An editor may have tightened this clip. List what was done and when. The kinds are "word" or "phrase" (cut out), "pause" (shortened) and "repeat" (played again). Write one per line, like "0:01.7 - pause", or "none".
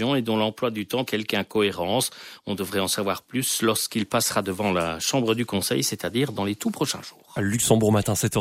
0:01.1 - word